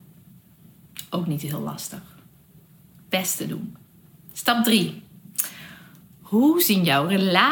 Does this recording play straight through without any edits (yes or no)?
yes